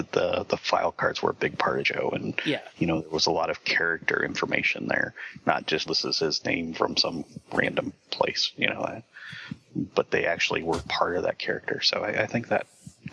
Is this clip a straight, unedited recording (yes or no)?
no